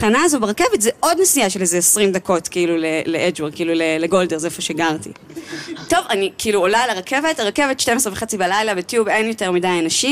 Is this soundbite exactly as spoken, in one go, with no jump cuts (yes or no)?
yes